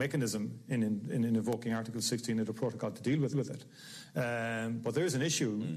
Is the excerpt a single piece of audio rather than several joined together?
no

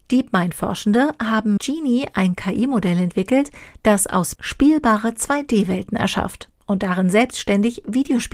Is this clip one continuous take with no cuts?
no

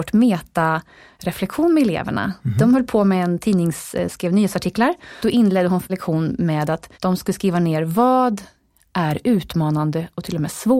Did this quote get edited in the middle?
yes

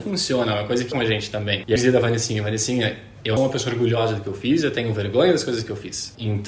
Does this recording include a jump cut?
yes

